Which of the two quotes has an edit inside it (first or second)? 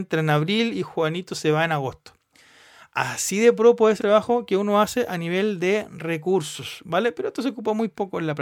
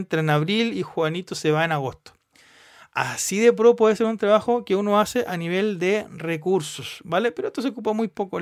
first